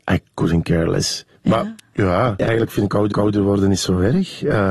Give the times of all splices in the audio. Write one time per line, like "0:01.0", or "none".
0:01.4
0:03.1